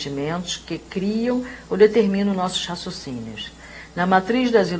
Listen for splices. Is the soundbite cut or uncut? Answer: uncut